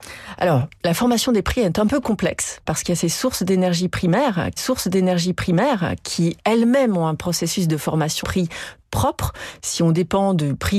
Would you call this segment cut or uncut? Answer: cut